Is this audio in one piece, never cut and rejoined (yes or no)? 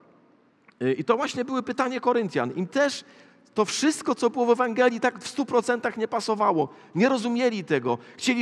yes